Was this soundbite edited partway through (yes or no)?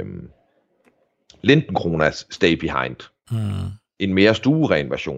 no